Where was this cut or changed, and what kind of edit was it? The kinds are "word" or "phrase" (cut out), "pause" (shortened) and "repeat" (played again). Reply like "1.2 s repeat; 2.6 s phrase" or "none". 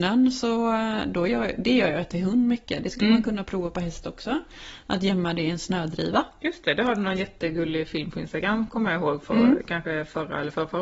none